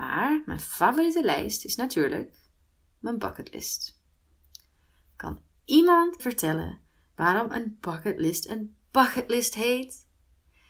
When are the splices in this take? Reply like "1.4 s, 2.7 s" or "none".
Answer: 6.2 s